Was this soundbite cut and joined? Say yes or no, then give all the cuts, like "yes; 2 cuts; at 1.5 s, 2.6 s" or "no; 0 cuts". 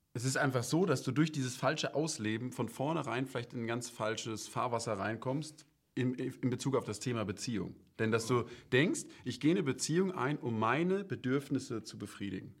no; 0 cuts